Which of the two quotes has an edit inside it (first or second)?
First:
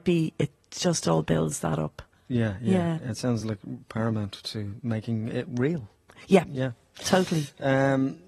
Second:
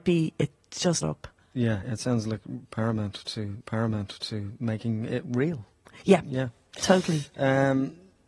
second